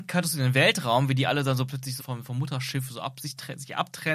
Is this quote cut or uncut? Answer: cut